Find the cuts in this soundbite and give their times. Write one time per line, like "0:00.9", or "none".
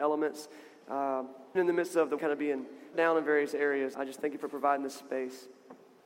0:01.6
0:02.2
0:02.9
0:03.9